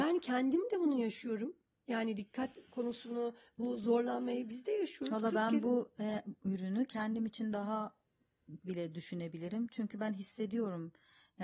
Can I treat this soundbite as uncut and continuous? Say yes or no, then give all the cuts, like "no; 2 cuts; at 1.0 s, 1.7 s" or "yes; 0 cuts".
yes; 0 cuts